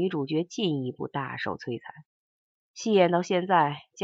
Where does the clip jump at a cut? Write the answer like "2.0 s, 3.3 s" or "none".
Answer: 2.3 s